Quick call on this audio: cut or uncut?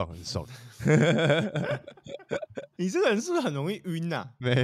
uncut